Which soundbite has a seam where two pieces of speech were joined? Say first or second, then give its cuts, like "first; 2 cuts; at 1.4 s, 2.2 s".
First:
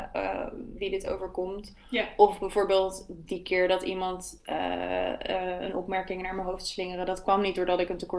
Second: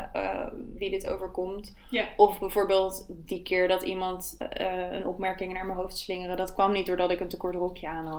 second; 1 cut; at 4.4 s